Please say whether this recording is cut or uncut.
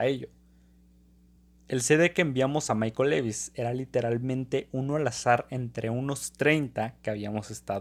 uncut